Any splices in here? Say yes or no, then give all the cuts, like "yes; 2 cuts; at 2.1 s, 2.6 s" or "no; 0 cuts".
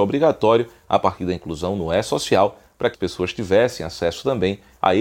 yes; 1 cut; at 2.9 s